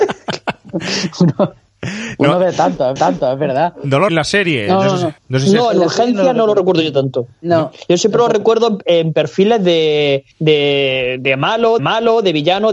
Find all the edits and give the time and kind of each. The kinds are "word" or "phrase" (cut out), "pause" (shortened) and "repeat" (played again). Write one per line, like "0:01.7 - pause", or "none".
0:03.0 - repeat
0:04.1 - phrase
0:05.2 - pause
0:08.8 - word
0:10.3 - pause
0:11.8 - repeat